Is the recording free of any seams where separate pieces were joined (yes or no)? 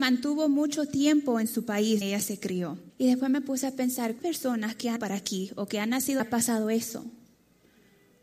no